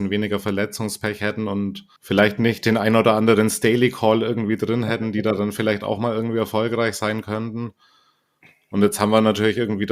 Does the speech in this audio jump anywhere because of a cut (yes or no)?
yes